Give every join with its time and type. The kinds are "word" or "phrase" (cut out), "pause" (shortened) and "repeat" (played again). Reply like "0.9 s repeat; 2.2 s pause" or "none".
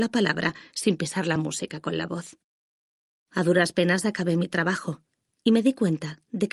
none